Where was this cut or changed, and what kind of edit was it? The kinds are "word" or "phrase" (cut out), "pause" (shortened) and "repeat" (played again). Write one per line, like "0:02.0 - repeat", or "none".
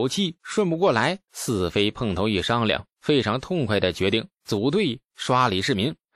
0:01.3 - pause